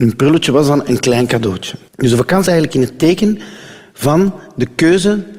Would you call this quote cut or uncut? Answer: cut